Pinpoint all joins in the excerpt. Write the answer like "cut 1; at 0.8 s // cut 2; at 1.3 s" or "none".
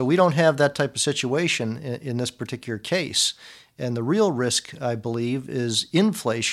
none